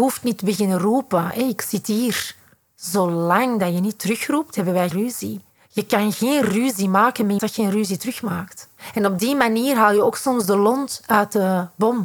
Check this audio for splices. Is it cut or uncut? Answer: cut